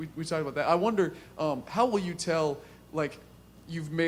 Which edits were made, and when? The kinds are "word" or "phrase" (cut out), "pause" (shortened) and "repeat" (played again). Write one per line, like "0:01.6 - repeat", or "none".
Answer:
none

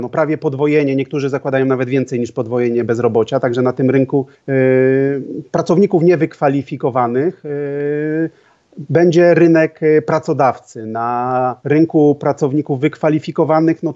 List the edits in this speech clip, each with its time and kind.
0:04.3 - pause
0:11.6 - pause

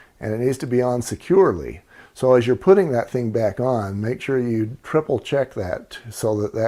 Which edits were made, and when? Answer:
none

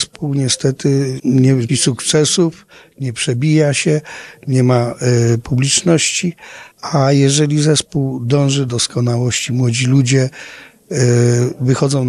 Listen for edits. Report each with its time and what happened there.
0:01.2 - word
0:01.7 - word
0:06.7 - pause
0:08.7 - word

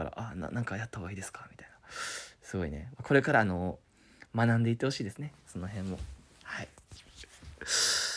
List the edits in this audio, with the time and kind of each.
none

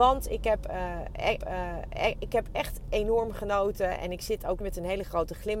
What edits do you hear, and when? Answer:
0:01.4 - repeat
0:04.6 - word

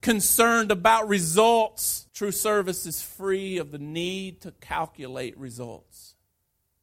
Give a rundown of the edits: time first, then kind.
0:02.1 - pause

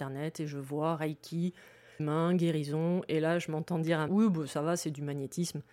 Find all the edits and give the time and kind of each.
0:02.0 - phrase
0:04.1 - phrase

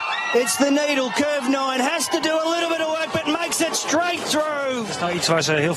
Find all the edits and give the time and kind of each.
none

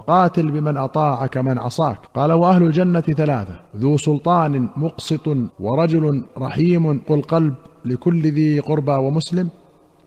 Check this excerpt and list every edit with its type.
0:02.1 - pause
0:03.7 - pause
0:05.5 - phrase
0:07.0 - word

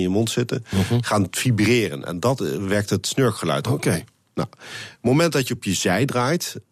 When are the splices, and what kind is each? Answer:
none

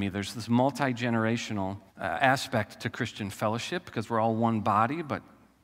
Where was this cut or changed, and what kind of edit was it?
0:01.9 - pause

